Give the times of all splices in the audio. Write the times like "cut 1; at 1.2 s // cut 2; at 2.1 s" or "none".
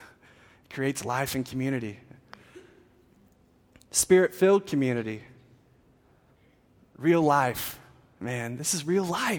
none